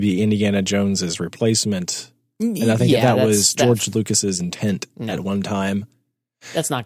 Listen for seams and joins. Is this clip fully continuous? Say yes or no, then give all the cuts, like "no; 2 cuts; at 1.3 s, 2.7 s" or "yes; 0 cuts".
yes; 0 cuts